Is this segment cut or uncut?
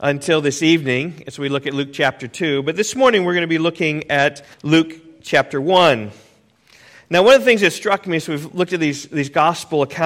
cut